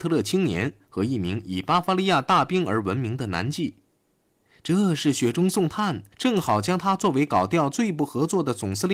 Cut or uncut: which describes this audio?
cut